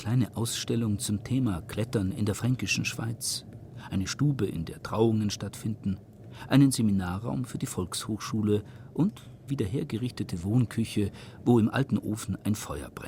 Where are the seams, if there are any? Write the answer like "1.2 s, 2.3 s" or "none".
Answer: 9.5 s